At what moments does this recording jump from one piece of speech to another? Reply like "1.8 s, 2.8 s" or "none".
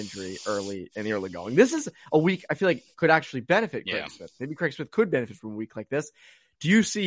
none